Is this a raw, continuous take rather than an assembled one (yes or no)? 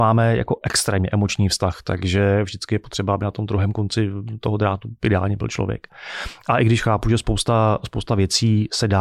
yes